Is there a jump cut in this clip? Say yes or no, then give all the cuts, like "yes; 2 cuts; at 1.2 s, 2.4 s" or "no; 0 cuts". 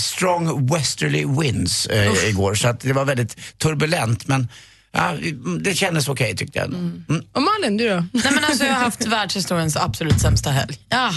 no; 0 cuts